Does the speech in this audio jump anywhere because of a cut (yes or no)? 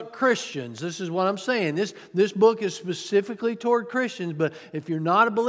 no